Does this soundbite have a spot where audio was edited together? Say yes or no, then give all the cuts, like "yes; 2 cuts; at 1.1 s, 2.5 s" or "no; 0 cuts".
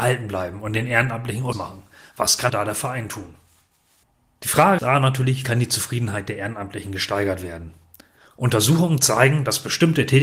yes; 4 cuts; at 1.5 s, 2.5 s, 4.8 s, 5.4 s